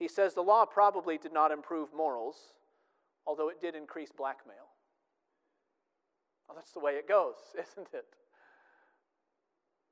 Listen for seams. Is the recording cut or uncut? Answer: uncut